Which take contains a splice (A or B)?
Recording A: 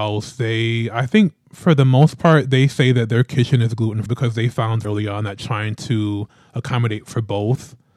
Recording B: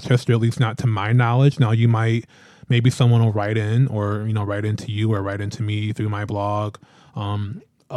A